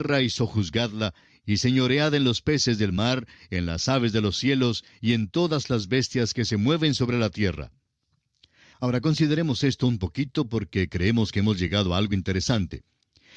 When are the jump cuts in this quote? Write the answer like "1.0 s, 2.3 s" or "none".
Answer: none